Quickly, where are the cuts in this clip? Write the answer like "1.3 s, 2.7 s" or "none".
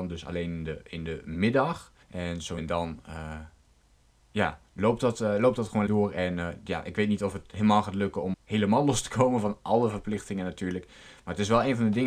2.0 s, 2.6 s, 4.7 s, 5.9 s, 8.3 s